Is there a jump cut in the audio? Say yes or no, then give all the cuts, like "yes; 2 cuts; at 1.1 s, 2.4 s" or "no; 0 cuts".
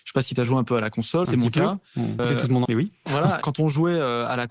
yes; 4 cuts; at 1.3 s, 2.2 s, 2.7 s, 3.4 s